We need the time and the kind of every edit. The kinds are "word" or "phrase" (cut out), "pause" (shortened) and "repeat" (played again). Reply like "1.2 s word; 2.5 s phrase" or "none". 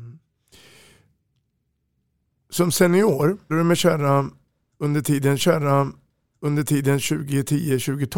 3.5 s phrase; 5.4 s repeat